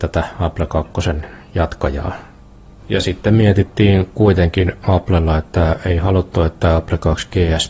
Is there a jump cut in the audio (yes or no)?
no